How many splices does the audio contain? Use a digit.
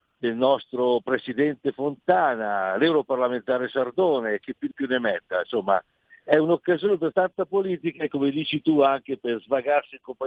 2